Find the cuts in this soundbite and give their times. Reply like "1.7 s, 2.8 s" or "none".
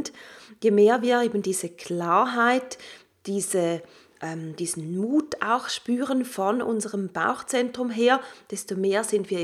none